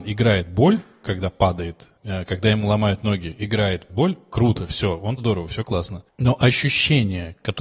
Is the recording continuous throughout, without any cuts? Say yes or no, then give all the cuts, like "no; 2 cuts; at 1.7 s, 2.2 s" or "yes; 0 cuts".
no; 3 cuts; at 2.0 s, 3.9 s, 5.2 s